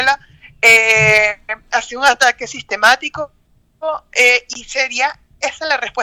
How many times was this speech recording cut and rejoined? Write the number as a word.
zero